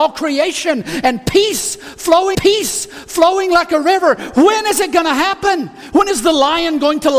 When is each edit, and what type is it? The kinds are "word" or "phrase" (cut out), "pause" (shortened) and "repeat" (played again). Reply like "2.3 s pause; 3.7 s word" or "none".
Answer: 2.3 s repeat